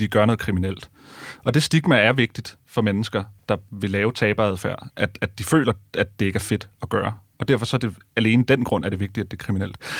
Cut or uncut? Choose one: uncut